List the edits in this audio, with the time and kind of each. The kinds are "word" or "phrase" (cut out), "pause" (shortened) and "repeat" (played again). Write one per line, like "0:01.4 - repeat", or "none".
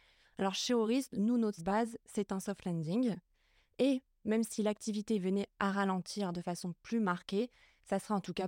0:01.6 - word